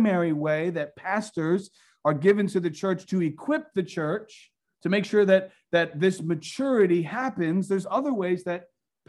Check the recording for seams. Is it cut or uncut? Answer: uncut